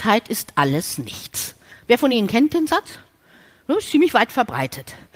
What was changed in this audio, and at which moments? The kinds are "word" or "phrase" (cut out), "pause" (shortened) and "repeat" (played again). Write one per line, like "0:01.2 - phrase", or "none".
none